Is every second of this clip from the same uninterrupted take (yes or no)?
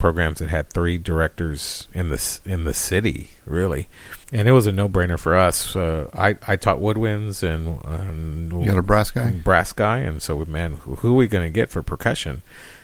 no